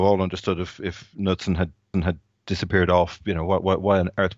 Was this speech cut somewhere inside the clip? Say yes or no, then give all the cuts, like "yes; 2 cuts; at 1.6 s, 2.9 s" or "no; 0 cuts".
yes; 1 cut; at 1.9 s